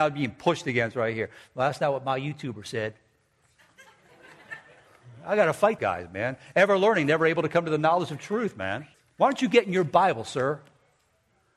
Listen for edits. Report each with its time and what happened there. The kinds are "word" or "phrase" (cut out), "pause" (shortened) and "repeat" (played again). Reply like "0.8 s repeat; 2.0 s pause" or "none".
5.8 s word; 8.9 s pause